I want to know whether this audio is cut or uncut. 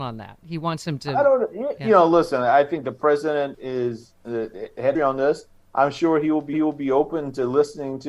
cut